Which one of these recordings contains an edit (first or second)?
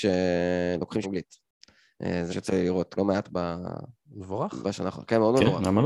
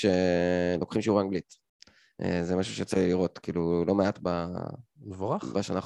first